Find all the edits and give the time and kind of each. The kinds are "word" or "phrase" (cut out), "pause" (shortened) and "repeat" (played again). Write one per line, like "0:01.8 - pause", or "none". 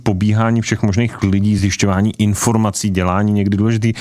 none